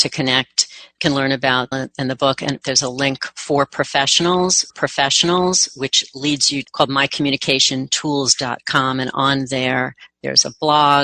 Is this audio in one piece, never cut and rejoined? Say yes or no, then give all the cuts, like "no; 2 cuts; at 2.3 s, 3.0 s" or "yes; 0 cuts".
no; 4 cuts; at 1.7 s, 2.6 s, 4.7 s, 6.6 s